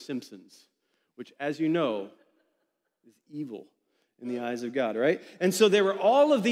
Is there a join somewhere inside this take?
no; 0 cuts

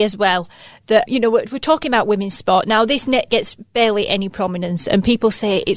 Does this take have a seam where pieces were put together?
yes; 1 cut; at 1.1 s

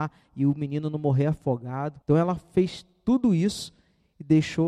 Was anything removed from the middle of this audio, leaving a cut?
yes; 1 cut; at 2.0 s

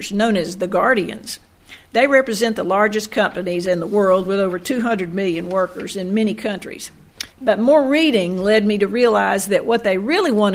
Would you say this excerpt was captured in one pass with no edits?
no; 1 cut; at 7.3 s

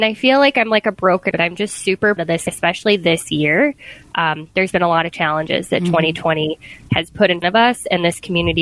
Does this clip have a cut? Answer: yes; 4 cuts; at 1.3 s, 2.2 s, 2.5 s, 7.4 s

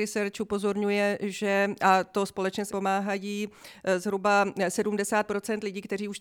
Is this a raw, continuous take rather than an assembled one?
no; 1 cut; at 2.7 s

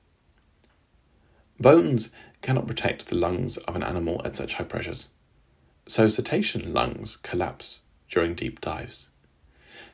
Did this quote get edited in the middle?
no; 0 cuts

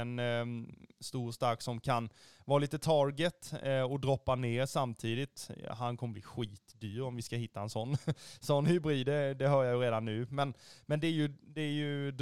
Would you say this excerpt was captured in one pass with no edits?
yes; 0 cuts

